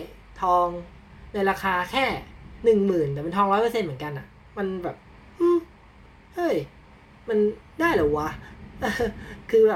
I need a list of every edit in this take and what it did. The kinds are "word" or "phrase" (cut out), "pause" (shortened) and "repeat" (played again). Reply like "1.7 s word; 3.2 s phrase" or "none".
none